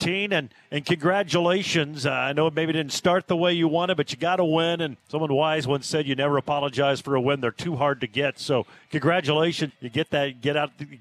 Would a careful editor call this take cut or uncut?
cut